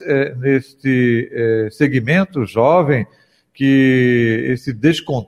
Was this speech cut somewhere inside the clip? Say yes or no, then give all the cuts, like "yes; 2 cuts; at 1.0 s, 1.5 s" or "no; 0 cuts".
no; 0 cuts